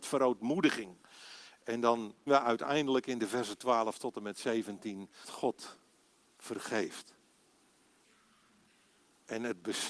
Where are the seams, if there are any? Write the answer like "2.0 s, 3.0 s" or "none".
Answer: 2.3 s, 5.2 s